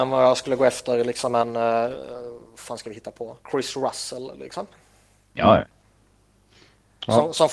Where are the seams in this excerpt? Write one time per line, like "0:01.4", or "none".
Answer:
0:03.4